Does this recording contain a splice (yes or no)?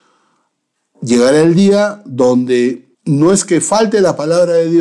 yes